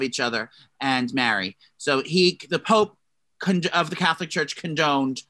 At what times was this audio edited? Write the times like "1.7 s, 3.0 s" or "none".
none